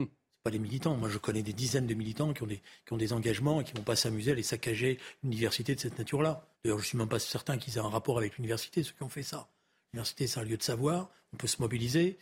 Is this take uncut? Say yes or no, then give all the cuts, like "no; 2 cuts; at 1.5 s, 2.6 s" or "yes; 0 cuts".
no; 1 cut; at 6.5 s